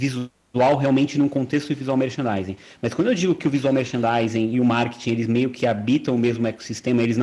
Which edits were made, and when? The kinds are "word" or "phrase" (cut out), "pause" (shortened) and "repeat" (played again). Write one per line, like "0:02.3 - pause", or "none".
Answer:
none